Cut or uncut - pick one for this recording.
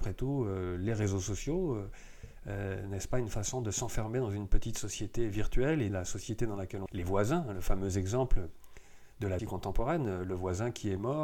cut